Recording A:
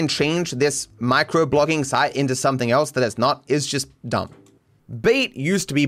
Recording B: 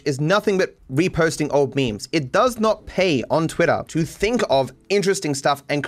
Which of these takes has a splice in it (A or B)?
B